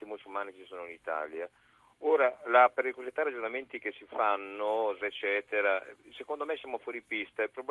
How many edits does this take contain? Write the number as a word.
one